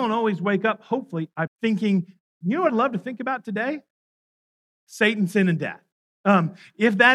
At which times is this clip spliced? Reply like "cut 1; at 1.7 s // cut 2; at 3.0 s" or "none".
cut 1; at 1.5 s // cut 2; at 2.7 s